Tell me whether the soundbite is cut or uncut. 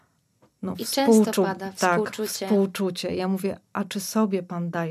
uncut